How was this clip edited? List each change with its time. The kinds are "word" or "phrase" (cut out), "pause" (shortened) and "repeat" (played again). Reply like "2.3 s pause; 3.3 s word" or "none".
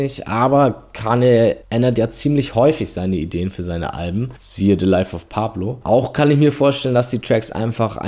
1.6 s pause